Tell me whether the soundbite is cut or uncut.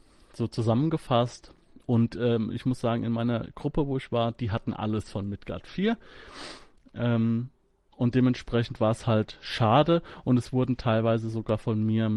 uncut